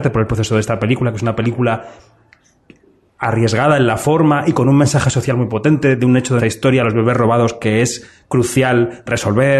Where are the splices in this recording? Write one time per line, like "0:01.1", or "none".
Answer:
0:06.4